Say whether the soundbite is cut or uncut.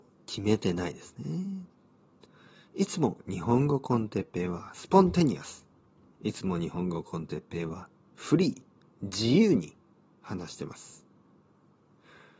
uncut